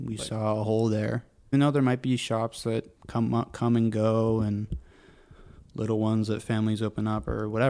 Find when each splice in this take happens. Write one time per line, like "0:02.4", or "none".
0:01.5
0:03.0